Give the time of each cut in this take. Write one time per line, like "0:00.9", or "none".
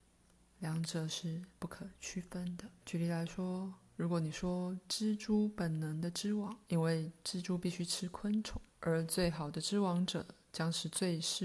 0:02.8
0:03.9
0:06.6
0:08.7

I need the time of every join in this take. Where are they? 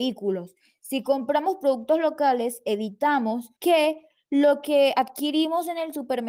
0:03.6

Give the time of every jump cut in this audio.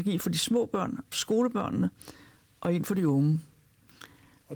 0:01.1

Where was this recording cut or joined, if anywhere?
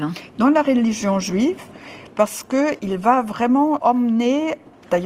none

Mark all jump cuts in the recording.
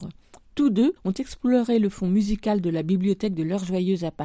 0:01.0

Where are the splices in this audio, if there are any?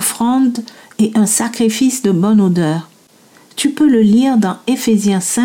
none

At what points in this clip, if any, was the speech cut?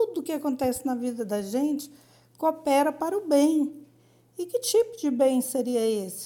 none

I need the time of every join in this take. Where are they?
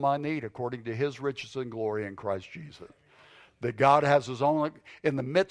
none

